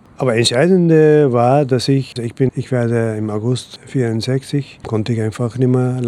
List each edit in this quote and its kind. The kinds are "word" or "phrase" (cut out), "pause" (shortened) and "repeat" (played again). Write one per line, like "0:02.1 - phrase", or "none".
0:02.2 - word
0:02.5 - word
0:04.8 - word